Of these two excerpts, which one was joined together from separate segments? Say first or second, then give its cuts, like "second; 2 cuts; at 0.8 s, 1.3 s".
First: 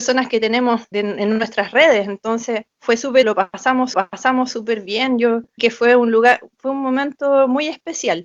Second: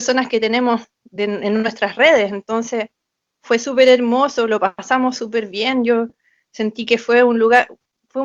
first; 6 cuts; at 0.9 s, 2.7 s, 3.2 s, 3.9 s, 5.6 s, 6.5 s